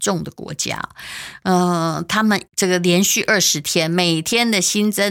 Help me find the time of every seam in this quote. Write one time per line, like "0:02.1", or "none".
0:02.5